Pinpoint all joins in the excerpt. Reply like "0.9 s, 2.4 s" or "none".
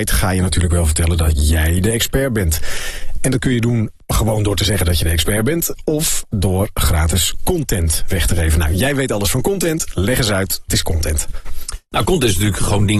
10.7 s